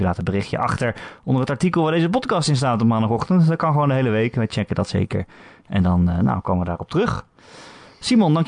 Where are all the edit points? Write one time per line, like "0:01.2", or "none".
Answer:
none